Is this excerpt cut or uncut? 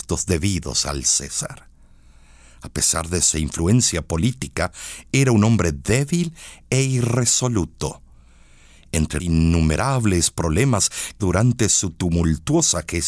cut